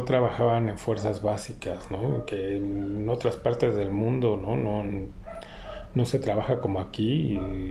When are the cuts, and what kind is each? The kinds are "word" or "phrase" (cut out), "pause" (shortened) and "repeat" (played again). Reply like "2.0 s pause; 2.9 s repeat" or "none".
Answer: none